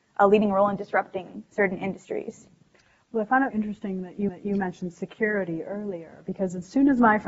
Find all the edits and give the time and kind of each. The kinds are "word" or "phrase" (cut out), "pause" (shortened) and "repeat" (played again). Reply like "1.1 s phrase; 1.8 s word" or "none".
3.5 s word; 4.3 s repeat